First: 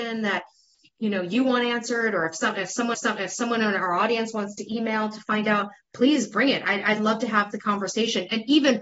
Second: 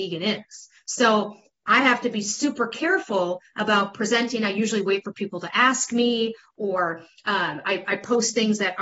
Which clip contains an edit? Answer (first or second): first